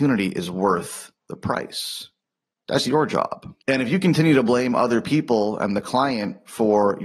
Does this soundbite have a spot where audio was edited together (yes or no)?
yes